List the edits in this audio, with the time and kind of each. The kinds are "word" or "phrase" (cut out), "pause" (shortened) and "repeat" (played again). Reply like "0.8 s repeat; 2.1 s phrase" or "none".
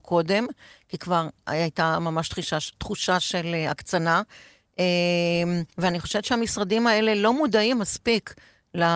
5.7 s pause